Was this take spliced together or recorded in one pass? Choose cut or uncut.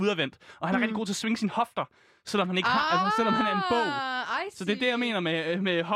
uncut